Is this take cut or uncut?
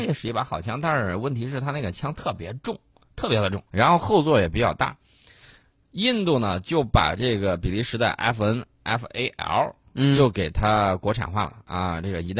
cut